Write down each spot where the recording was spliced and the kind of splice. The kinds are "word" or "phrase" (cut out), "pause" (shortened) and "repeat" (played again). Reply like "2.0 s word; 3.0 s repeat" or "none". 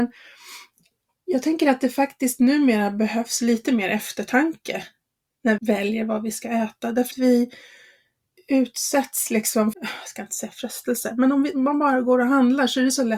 5.6 s word; 7.1 s word; 9.7 s word

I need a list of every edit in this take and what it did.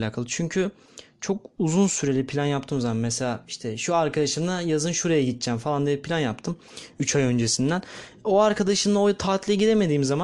none

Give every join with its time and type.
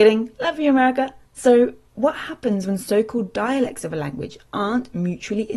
1.2 s pause

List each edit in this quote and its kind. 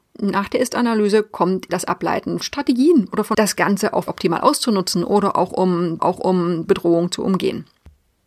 1.7 s word; 2.4 s word; 3.3 s word; 4.1 s word; 6.0 s repeat

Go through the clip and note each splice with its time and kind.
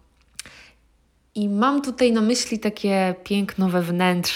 none

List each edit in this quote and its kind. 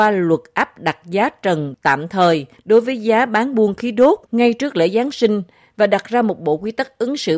none

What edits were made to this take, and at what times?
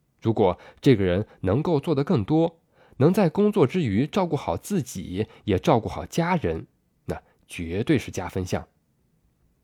none

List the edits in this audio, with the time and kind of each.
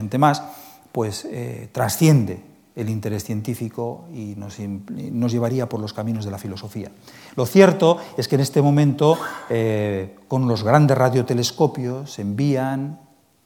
none

